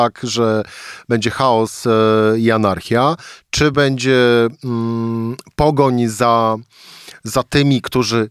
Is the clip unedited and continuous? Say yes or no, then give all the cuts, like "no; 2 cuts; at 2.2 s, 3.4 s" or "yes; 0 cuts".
yes; 0 cuts